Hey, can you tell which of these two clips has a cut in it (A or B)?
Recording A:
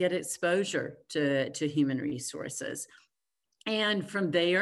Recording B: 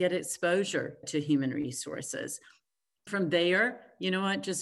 B